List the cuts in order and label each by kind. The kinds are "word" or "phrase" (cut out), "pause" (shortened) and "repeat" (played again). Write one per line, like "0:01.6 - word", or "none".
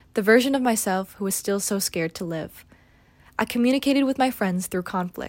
none